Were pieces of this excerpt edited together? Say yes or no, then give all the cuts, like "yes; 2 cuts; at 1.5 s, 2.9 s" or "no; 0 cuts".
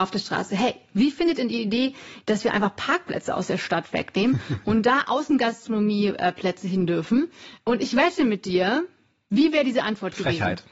no; 0 cuts